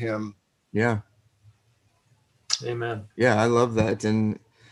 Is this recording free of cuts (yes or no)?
no